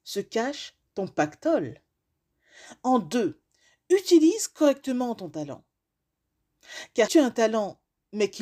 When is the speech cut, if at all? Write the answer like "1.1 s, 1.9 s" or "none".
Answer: 7.1 s